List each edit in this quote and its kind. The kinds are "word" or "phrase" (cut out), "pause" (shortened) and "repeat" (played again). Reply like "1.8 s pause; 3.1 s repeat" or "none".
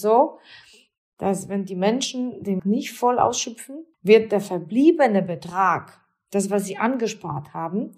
2.6 s phrase; 3.9 s pause